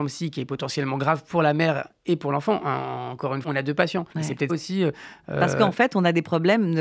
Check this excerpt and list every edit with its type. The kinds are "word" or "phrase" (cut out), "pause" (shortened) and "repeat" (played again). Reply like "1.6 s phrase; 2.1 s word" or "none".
3.4 s word; 4.1 s pause; 4.5 s word